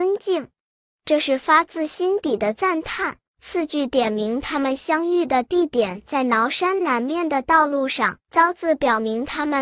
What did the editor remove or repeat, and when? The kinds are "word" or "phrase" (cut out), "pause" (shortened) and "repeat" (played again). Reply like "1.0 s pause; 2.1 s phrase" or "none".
3.3 s pause; 8.2 s pause

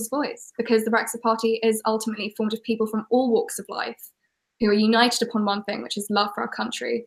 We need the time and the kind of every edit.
none

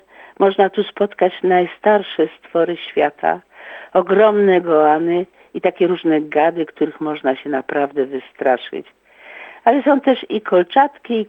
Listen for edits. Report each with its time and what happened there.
none

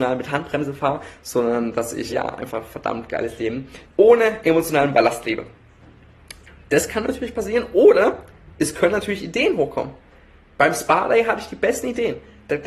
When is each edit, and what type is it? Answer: 2.1 s word; 3.8 s word

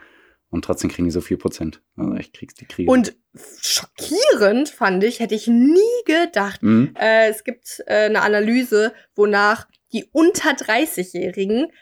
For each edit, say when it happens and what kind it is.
none

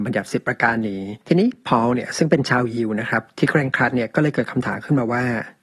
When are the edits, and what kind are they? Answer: 1.2 s pause

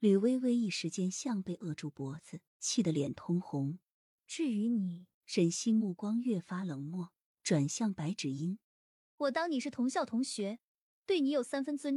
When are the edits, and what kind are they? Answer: 2.5 s pause; 3.9 s pause; 5.1 s pause; 8.6 s pause

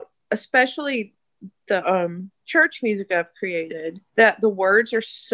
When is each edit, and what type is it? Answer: 2.4 s pause; 4.1 s pause

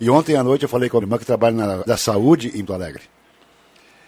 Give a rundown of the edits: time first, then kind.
1.0 s word; 1.9 s word; 2.7 s word

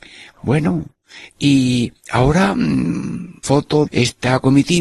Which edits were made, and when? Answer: 2.0 s pause; 3.4 s word; 3.9 s word

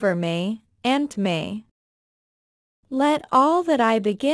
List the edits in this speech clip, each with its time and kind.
1.1 s word

